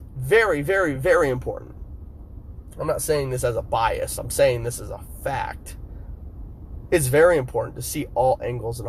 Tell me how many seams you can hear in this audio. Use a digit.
0